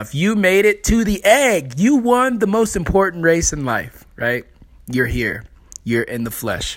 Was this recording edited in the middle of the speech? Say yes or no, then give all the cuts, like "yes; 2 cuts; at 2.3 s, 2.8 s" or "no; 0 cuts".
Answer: no; 0 cuts